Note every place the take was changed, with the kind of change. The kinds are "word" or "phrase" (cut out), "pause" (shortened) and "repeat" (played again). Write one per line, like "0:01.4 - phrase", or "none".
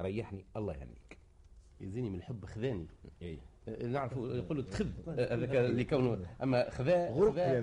0:01.7 - pause